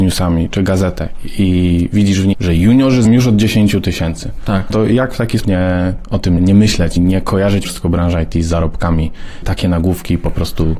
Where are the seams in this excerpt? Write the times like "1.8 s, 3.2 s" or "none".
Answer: 2.3 s, 3.0 s, 4.7 s, 5.4 s, 6.4 s, 7.0 s, 7.6 s, 9.4 s